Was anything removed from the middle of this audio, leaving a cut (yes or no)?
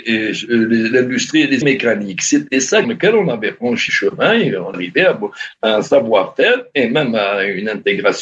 yes